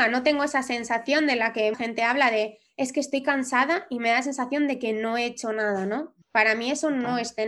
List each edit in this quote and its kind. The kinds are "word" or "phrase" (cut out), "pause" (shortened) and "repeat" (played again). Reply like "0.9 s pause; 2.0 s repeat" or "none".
1.7 s word; 6.2 s pause